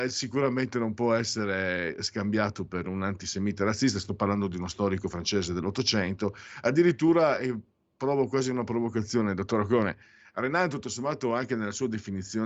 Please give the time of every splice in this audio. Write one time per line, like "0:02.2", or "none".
none